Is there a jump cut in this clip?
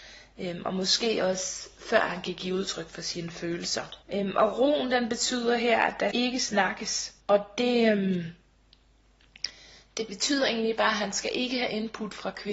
yes; 3 cuts; at 4.0 s, 6.1 s, 7.2 s

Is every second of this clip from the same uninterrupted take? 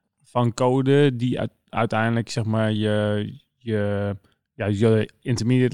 yes; 0 cuts

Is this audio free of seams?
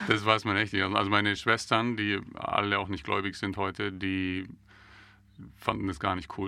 yes; 0 cuts

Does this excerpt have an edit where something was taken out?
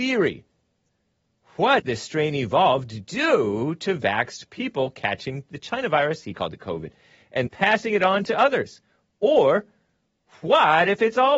yes; 2 cuts; at 1.8 s, 7.5 s

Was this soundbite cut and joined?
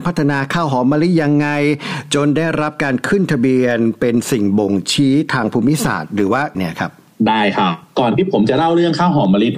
yes; 1 cut; at 6.5 s

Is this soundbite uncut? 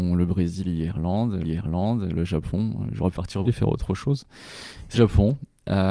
no; 4 cuts; at 1.4 s, 3.1 s, 3.4 s, 4.9 s

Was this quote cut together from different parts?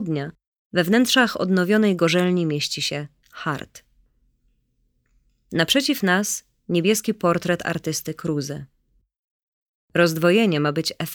no; 0 cuts

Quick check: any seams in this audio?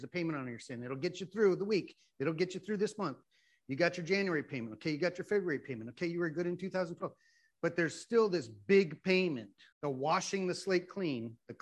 yes; 1 cut; at 9.7 s

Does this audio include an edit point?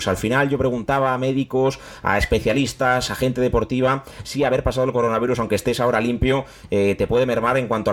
no; 0 cuts

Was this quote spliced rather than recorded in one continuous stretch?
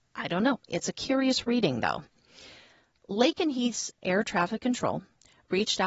no; 0 cuts

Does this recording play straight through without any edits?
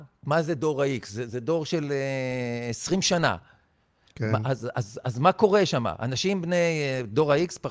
yes; 0 cuts

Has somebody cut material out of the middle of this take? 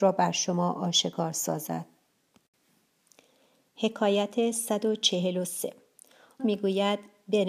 yes; 1 cut; at 6.4 s

